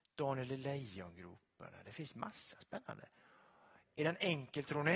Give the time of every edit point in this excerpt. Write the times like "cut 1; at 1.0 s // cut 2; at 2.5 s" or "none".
none

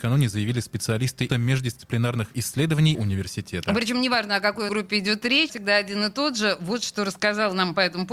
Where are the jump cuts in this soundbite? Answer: cut 1; at 1.3 s // cut 2; at 2.3 s // cut 3; at 2.9 s // cut 4; at 4.7 s // cut 5; at 5.5 s

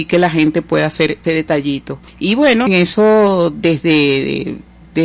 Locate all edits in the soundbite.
cut 1; at 1.2 s // cut 2; at 2.1 s // cut 3; at 2.7 s

